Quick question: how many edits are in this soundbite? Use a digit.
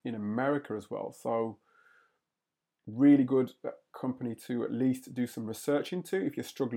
0